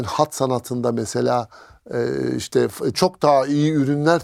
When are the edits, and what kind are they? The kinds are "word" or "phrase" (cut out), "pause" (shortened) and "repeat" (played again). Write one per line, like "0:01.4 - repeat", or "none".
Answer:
0:02.9 - word